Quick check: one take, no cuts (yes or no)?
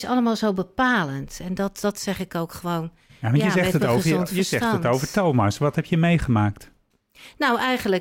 yes